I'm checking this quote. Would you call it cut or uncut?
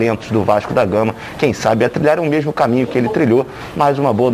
uncut